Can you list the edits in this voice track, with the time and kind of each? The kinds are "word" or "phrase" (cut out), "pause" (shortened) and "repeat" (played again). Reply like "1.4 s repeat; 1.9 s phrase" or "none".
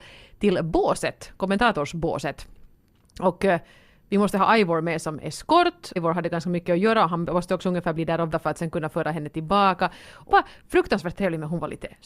6.0 s word; 8.3 s word; 10.3 s word